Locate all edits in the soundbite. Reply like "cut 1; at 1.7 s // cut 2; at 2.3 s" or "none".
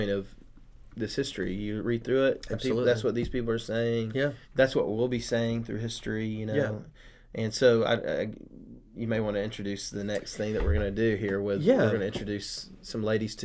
cut 1; at 4.4 s